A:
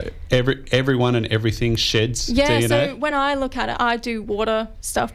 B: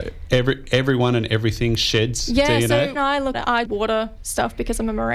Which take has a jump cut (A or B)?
B